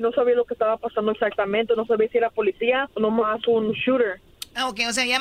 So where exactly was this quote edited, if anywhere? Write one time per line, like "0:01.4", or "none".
0:02.9